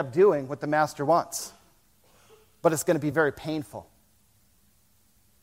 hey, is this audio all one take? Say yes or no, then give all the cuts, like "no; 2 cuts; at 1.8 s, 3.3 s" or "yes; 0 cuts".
yes; 0 cuts